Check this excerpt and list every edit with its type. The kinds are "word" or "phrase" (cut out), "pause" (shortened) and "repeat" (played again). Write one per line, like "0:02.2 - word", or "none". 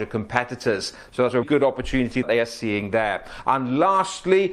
0:01.4 - word
0:02.2 - word